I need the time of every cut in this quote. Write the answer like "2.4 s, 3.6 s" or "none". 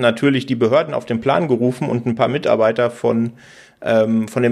none